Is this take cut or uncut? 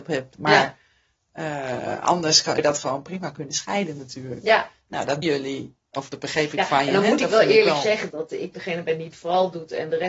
cut